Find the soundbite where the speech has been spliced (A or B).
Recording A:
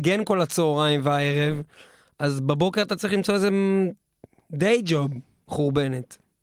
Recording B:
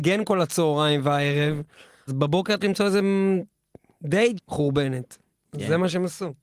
B